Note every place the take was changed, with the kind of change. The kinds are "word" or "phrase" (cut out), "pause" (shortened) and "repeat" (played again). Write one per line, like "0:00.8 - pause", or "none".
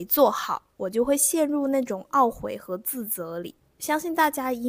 0:03.6 - pause